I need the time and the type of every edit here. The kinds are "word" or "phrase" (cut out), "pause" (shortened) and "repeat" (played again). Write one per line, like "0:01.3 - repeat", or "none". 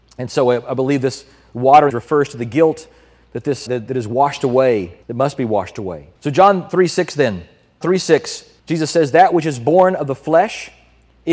0:01.9 - phrase
0:03.7 - word
0:05.0 - pause
0:06.2 - pause
0:07.8 - word
0:08.6 - pause